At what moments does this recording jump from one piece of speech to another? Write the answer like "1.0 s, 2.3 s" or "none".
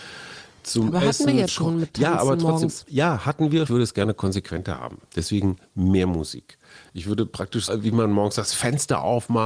1.5 s, 3.7 s, 7.7 s